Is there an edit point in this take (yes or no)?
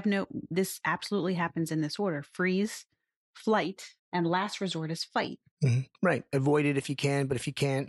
yes